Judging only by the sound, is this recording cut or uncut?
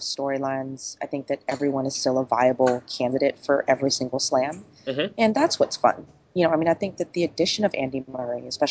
uncut